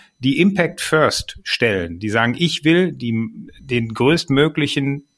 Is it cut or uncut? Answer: uncut